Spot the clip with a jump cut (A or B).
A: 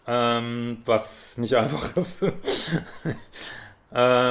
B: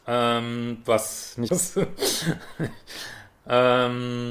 B